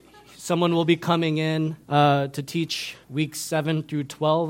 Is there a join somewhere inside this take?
yes; 2 cuts; at 1.8 s, 3.0 s

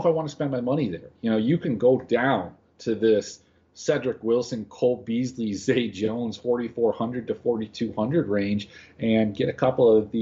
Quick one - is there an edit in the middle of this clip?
no; 0 cuts

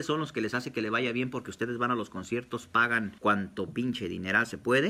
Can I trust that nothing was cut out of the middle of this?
no; 1 cut; at 3.2 s

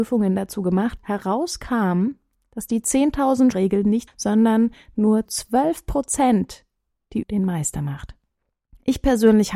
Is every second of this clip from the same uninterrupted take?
no; 5 cuts; at 1.0 s, 3.5 s, 4.1 s, 5.3 s, 7.2 s

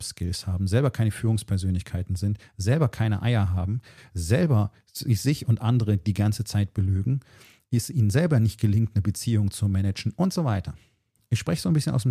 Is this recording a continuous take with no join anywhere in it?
yes; 0 cuts

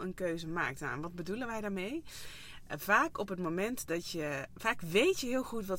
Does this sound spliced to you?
no; 0 cuts

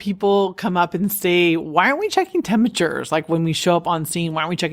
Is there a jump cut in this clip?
no; 0 cuts

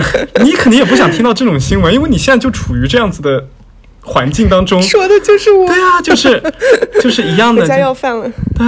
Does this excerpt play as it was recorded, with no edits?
yes; 0 cuts

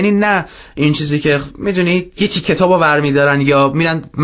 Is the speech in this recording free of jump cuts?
no; 1 cut; at 2.4 s

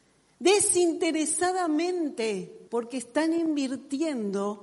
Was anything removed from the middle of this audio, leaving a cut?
yes; 1 cut; at 2.7 s

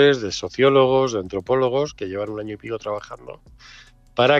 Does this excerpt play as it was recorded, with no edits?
yes; 0 cuts

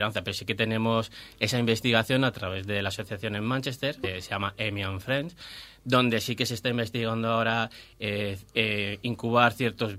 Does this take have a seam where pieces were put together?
yes; 1 cut; at 4.0 s

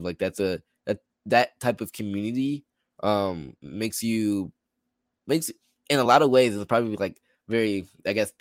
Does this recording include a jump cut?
no; 0 cuts

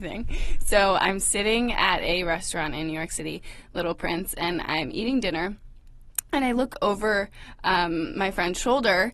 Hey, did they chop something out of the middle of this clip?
no; 0 cuts

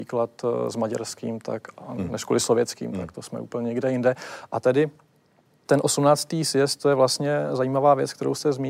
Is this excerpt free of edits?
yes; 0 cuts

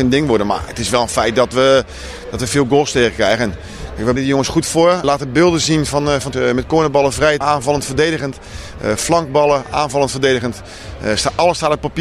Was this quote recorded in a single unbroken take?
no; 4 cuts; at 4.2 s, 5.0 s, 6.3 s, 7.4 s

